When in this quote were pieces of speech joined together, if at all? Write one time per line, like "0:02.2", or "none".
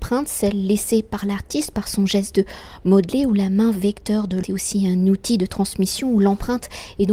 0:04.4